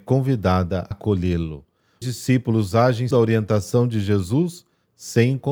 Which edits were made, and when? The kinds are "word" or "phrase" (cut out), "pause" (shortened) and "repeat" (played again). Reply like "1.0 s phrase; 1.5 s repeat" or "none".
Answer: 0.9 s word; 2.0 s phrase; 3.1 s word